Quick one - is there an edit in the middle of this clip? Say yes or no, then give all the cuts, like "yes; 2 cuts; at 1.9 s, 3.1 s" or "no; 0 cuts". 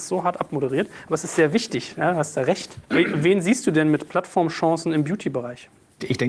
no; 0 cuts